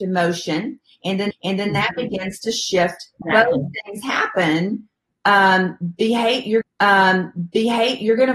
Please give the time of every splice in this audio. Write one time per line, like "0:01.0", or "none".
0:01.3
0:03.2
0:06.6